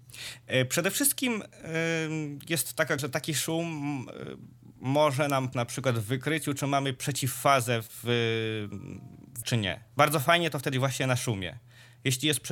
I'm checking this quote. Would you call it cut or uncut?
cut